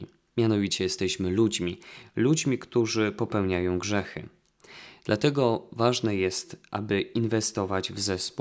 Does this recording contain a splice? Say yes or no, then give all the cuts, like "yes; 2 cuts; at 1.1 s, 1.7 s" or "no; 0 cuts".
no; 0 cuts